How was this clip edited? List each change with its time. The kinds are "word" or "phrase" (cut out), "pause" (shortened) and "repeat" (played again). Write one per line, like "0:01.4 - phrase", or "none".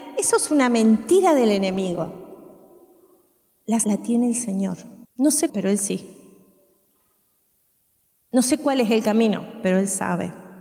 0:03.8 - word
0:05.0 - pause
0:05.5 - word